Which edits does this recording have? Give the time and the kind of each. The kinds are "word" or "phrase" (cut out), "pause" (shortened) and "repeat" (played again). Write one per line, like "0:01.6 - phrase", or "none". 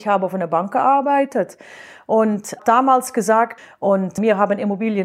0:02.6 - word